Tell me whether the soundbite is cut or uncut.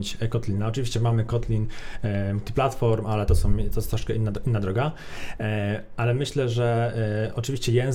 uncut